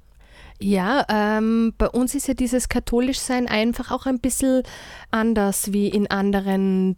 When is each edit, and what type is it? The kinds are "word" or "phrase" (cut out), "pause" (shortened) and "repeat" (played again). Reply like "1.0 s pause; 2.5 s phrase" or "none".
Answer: 5.1 s word